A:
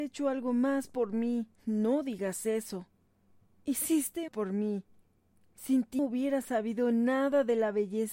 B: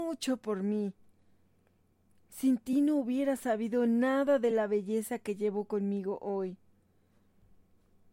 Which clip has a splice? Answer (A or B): A